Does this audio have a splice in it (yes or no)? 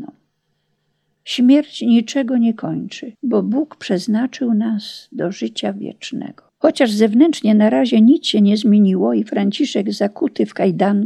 yes